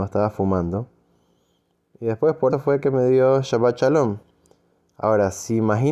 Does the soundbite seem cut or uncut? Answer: cut